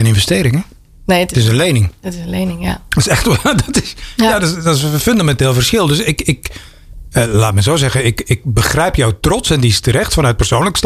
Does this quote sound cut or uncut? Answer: uncut